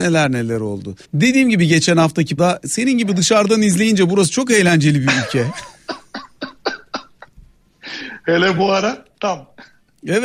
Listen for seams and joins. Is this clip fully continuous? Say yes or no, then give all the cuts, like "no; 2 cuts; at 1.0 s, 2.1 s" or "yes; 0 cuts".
no; 2 cuts; at 1.0 s, 2.4 s